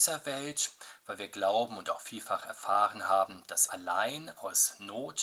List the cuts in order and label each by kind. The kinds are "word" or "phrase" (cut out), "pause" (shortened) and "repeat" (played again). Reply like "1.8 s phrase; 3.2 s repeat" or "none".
3.7 s word